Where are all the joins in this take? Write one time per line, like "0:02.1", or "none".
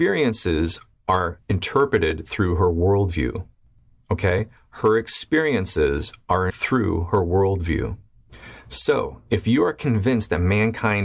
0:06.5